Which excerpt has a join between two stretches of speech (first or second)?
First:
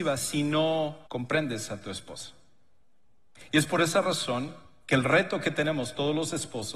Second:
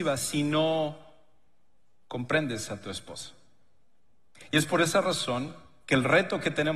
first